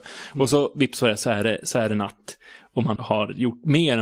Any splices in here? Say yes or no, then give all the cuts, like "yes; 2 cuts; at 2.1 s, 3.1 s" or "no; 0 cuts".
yes; 1 cut; at 3.0 s